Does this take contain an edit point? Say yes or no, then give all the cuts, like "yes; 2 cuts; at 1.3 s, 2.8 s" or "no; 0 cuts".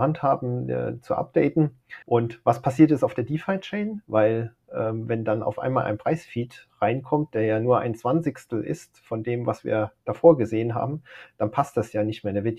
yes; 2 cuts; at 2.0 s, 10.0 s